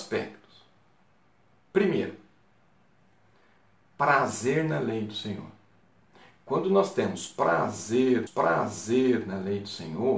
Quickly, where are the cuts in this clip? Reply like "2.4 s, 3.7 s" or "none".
5.8 s, 8.3 s